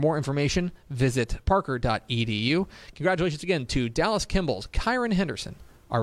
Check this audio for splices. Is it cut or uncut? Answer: cut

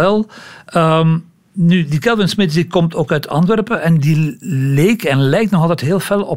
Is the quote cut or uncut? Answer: uncut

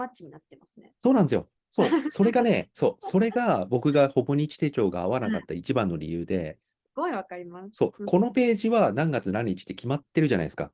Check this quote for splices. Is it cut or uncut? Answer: cut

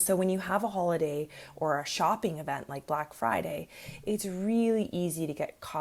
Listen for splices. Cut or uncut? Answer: uncut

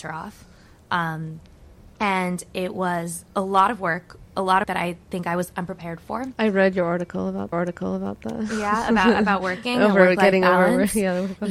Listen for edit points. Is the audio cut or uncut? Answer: cut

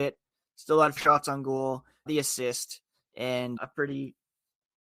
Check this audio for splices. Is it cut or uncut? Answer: cut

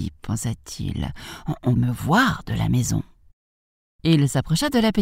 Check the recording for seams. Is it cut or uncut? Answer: cut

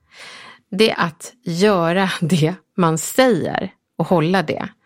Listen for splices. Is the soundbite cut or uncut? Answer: cut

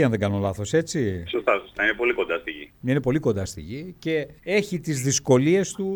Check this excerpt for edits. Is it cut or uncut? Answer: cut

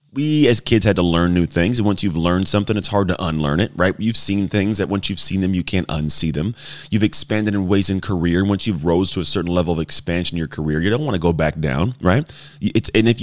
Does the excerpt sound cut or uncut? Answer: uncut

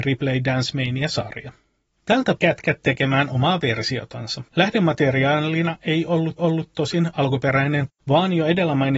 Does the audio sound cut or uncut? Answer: cut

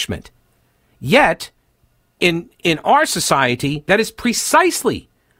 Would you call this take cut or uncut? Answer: uncut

